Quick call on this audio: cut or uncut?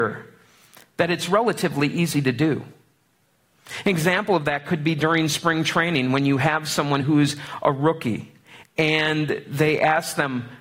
uncut